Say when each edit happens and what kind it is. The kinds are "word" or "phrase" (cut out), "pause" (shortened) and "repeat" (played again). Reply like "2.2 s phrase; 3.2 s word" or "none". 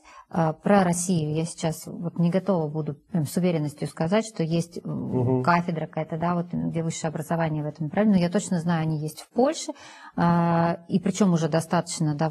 3.0 s pause